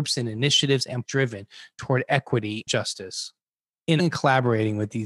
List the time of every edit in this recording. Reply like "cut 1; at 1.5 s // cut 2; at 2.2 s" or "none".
cut 1; at 1.0 s // cut 2; at 2.7 s // cut 3; at 4.0 s